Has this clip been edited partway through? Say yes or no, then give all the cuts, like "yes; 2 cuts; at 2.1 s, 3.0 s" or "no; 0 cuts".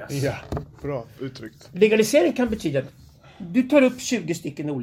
no; 0 cuts